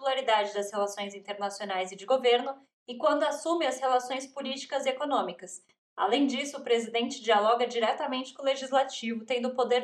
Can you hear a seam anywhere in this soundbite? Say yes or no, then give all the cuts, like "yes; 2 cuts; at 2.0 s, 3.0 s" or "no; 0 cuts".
no; 0 cuts